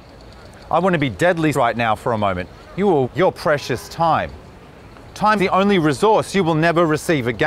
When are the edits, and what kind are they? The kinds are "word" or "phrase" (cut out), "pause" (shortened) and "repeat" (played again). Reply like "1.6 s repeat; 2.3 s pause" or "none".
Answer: 1.5 s word; 3.0 s word; 5.4 s word